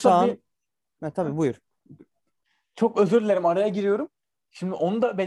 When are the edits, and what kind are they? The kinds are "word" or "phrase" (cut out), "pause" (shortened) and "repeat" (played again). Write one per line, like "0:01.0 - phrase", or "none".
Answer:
none